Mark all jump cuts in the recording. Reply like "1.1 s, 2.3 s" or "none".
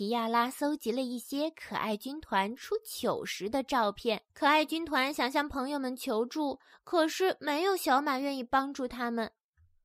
4.3 s

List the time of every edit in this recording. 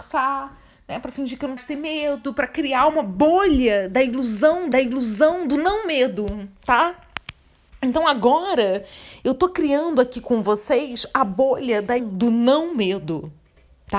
1.6 s, 4.7 s, 12.0 s

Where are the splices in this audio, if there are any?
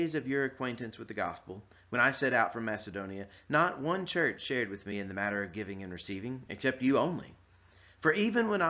none

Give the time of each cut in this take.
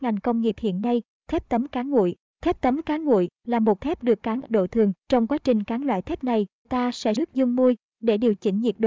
3.8 s, 4.4 s, 5.0 s, 6.6 s, 7.2 s

